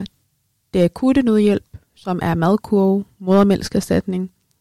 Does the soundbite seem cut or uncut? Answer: uncut